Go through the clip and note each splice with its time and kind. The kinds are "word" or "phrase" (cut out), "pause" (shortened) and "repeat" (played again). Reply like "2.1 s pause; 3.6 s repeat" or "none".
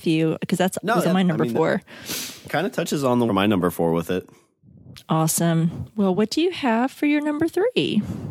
1.0 s word; 3.3 s phrase